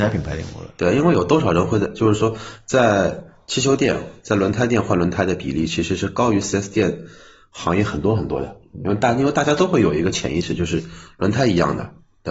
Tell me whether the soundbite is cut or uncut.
uncut